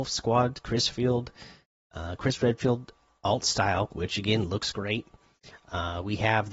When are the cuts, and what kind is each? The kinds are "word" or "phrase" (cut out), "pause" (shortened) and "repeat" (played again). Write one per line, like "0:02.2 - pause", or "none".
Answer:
none